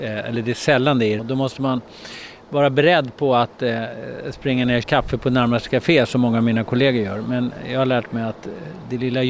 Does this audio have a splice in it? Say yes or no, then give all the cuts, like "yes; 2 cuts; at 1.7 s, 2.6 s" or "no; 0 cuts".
yes; 2 cuts; at 1.2 s, 4.8 s